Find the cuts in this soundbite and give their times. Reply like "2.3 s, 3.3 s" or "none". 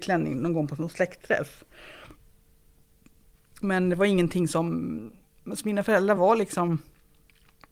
none